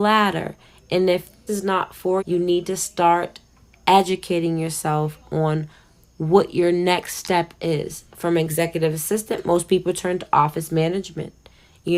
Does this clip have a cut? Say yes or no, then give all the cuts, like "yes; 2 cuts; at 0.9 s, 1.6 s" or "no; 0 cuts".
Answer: yes; 2 cuts; at 1.5 s, 2.2 s